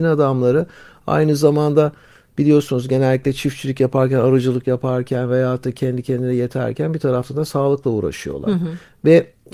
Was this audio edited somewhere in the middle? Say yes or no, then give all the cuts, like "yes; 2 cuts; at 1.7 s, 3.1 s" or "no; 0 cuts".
no; 0 cuts